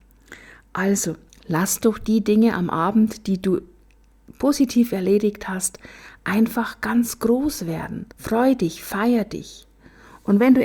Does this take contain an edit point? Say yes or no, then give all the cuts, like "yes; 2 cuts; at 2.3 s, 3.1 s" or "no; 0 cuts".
yes; 2 cuts; at 1.3 s, 8.1 s